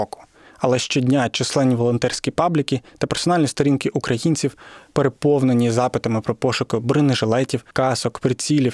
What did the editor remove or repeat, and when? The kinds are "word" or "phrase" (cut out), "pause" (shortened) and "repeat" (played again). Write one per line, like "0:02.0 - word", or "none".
0:07.7 - pause